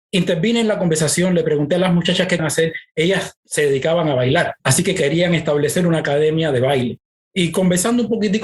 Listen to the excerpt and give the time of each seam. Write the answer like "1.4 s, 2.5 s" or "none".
2.4 s, 3.4 s, 4.6 s, 7.2 s